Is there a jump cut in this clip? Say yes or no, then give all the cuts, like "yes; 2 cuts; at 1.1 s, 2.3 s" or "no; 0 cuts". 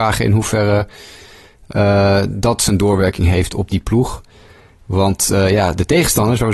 no; 0 cuts